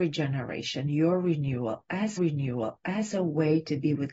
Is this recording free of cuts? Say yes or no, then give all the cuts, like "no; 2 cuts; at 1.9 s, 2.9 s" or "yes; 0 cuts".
no; 1 cut; at 2.2 s